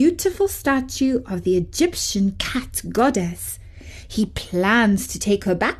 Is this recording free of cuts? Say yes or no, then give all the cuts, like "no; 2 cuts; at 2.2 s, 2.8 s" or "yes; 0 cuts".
yes; 0 cuts